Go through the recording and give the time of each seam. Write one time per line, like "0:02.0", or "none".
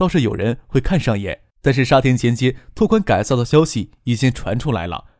0:01.5